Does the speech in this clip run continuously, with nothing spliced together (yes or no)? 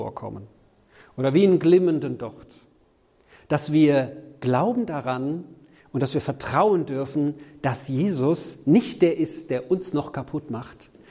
yes